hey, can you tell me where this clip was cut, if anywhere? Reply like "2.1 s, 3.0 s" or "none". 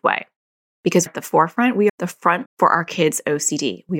1.1 s, 1.9 s, 2.5 s